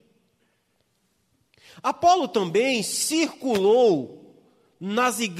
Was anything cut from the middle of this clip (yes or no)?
no